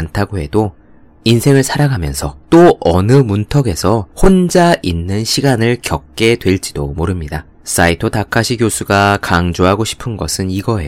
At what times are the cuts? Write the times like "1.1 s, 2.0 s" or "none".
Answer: 2.4 s, 4.1 s, 7.5 s